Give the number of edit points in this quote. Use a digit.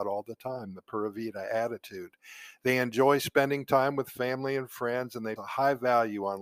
1